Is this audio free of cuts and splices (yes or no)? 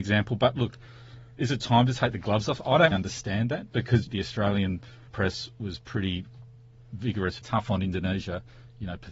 no